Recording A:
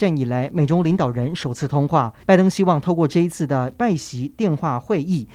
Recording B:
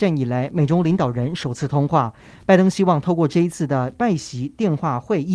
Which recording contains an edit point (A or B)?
A